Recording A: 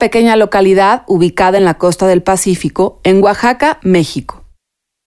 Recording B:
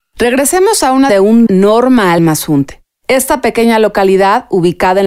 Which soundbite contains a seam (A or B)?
B